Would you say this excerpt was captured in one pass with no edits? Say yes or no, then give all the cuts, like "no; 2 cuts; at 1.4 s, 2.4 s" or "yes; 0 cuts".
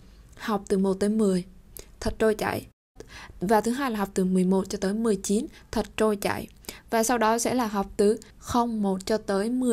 no; 1 cut; at 8.3 s